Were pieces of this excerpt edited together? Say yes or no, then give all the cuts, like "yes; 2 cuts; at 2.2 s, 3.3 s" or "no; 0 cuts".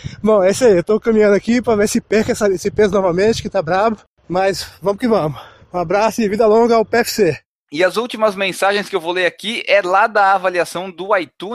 no; 0 cuts